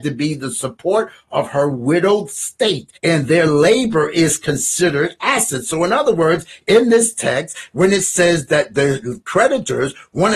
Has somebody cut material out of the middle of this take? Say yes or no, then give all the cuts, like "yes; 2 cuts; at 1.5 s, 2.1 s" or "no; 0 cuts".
yes; 1 cut; at 3.0 s